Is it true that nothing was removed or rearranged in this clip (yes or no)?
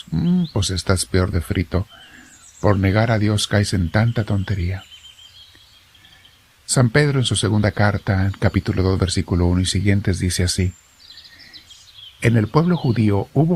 yes